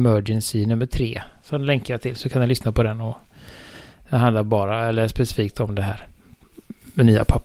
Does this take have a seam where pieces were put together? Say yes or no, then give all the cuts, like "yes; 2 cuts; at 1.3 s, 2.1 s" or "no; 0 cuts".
no; 0 cuts